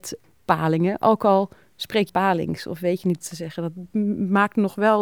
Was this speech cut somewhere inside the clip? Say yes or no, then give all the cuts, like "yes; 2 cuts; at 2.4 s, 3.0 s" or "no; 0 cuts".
yes; 2 cuts; at 2.1 s, 3.2 s